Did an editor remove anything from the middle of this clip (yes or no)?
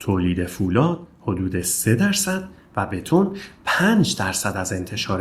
no